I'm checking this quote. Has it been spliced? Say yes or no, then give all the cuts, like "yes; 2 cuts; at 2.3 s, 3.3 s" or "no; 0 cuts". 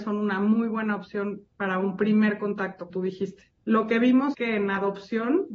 yes; 3 cuts; at 2.9 s, 3.6 s, 4.3 s